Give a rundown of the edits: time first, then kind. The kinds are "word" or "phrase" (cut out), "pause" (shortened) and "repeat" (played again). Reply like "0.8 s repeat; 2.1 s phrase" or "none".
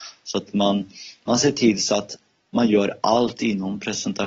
none

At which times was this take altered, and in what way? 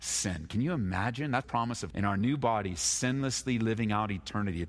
1.4 s word; 1.9 s word

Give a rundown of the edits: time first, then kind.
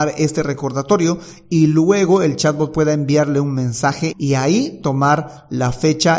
4.1 s word

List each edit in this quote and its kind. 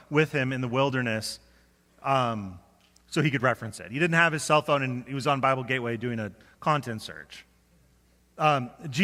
none

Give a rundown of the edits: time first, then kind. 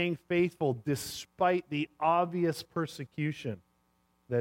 none

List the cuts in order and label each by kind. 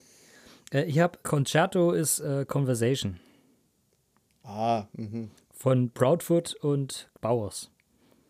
1.2 s word; 5.9 s word; 7.1 s word

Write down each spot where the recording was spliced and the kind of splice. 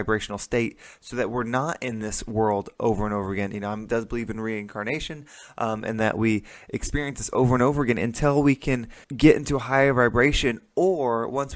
3.9 s phrase; 9.0 s pause

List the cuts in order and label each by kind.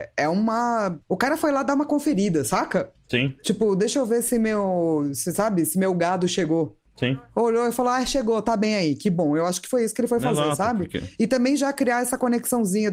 1.0 s pause

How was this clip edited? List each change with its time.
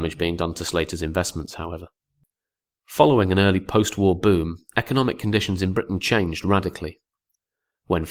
none

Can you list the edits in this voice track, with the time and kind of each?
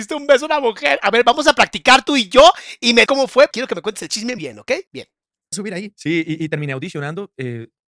3.1 s word; 3.5 s word; 4.4 s word; 4.9 s pause

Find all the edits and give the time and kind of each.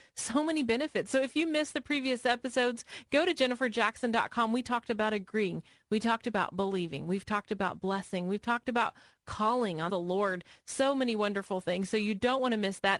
9.9 s phrase

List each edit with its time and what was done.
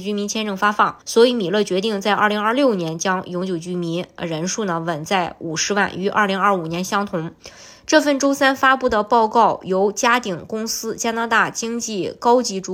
1.0 s pause

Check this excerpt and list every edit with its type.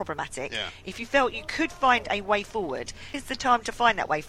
3.1 s word

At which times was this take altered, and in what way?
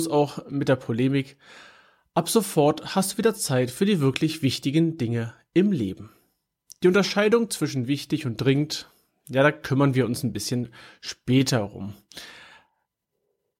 none

